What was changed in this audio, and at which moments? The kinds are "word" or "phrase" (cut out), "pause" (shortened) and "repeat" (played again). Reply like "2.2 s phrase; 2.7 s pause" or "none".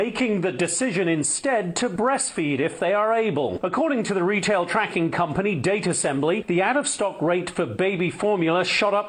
none